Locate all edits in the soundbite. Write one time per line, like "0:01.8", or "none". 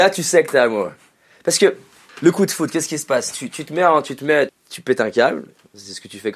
0:04.5